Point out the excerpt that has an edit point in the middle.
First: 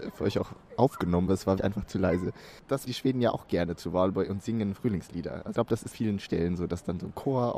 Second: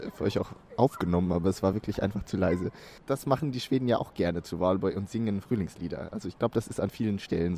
first; 5 cuts; at 1.3 s, 1.6 s, 2.9 s, 5.5 s, 5.9 s

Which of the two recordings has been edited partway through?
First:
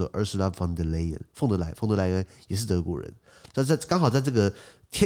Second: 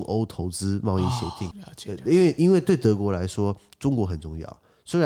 second; 1 cut; at 1.5 s

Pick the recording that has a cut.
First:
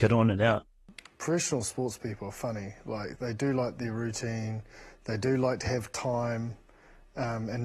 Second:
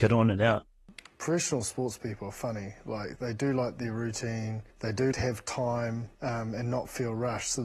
second; 3 cuts; at 4.7 s, 5.1 s, 6.1 s

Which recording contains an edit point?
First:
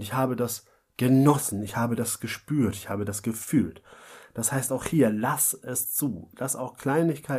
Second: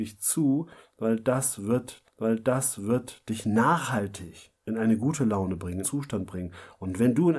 second; 3 cuts; at 2.0 s, 4.6 s, 5.8 s

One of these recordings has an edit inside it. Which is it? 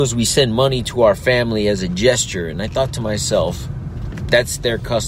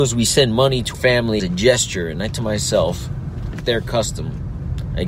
second; 4 cuts; at 0.9 s, 1.4 s, 2.3 s, 3.6 s

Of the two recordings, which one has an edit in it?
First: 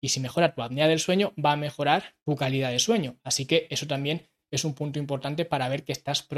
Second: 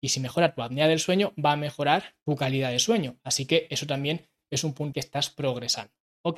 second; 1 cut; at 4.9 s

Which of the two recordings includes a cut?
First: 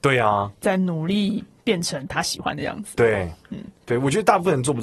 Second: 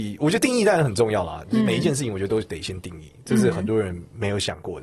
first; 1 cut; at 3.4 s

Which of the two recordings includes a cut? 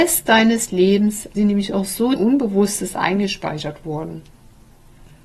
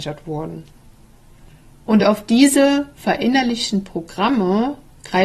first; 2 cuts; at 1.4 s, 2.2 s

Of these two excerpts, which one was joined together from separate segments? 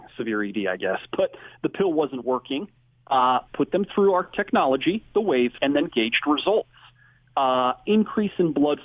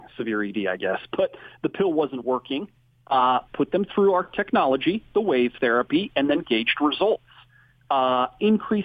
first; 1 cut; at 5.6 s

